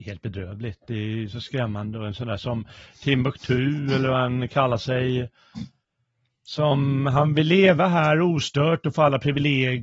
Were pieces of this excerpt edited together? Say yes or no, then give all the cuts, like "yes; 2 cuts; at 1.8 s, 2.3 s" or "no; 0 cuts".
no; 0 cuts